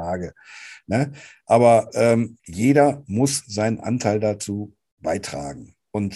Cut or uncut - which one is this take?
cut